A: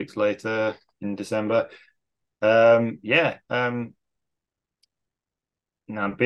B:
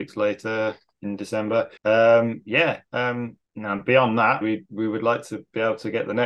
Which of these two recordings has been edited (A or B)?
B